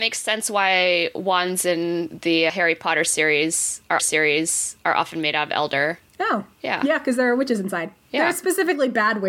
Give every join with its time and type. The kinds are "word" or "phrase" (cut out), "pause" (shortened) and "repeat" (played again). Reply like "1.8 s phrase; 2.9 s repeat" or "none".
2.5 s word; 4.0 s repeat; 6.1 s pause